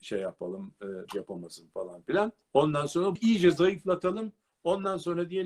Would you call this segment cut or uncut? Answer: cut